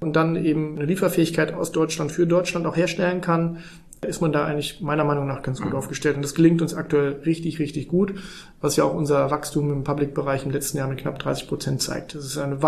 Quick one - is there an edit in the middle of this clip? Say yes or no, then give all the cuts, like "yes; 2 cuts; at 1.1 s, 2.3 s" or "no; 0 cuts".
no; 0 cuts